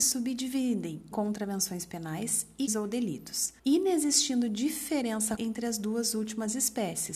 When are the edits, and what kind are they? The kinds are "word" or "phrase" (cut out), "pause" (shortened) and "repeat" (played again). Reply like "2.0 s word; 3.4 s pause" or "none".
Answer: 1.1 s word; 2.7 s word; 3.6 s pause; 5.4 s word